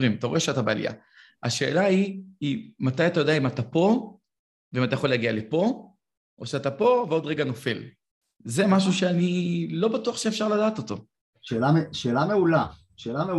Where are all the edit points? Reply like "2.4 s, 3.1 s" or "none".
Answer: none